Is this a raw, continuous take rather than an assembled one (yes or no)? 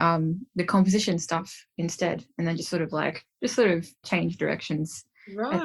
no